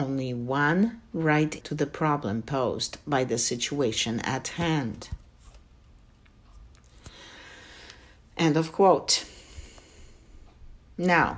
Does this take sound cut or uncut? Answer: cut